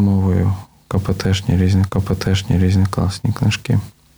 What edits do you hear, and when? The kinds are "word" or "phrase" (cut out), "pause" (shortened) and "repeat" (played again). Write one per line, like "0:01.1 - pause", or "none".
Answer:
0:01.9 - repeat